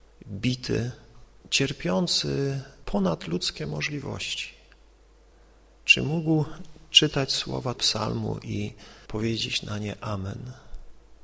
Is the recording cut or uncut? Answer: cut